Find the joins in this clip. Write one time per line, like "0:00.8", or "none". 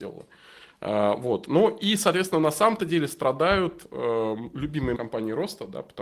0:05.0